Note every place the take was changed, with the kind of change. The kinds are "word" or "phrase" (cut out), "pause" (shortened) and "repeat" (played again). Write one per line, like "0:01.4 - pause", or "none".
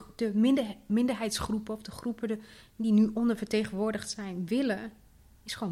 none

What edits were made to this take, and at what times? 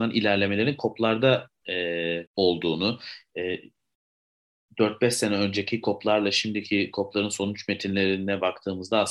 0:02.3 - pause

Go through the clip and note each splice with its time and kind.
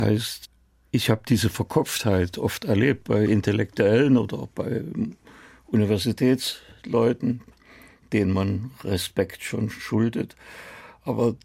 none

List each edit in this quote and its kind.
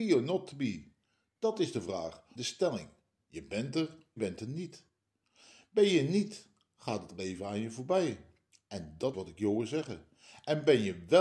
0:02.3 - phrase
0:04.2 - phrase
0:09.1 - word

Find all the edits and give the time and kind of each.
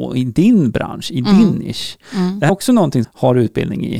0:02.5 - word
0:03.0 - phrase

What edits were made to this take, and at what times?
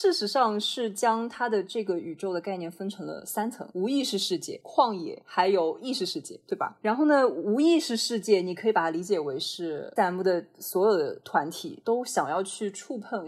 0:10.0 - word

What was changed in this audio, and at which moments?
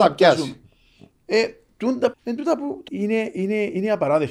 0:02.1 - phrase
0:02.9 - word

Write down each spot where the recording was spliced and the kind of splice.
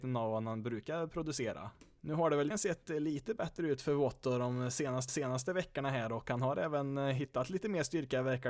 0:02.5 - word
0:05.1 - repeat

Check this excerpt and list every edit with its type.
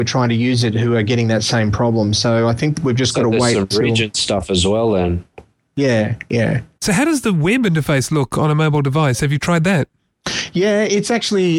none

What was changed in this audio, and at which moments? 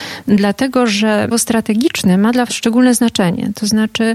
0:01.3 - word
0:02.5 - word

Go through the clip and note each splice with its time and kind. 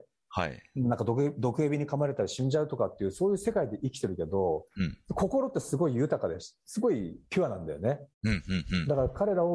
0:08.1 - pause

